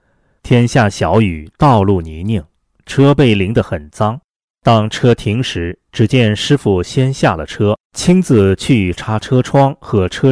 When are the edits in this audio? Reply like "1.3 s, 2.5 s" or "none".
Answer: 7.8 s